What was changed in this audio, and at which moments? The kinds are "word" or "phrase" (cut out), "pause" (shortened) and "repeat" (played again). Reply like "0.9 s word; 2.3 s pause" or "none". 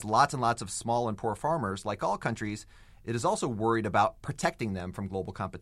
none